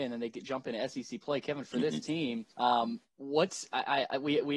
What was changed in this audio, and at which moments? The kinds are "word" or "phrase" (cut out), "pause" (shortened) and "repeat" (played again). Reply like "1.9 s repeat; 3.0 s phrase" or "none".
2.5 s pause